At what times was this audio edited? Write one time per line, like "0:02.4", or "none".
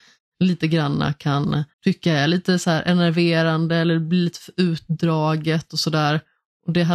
0:01.7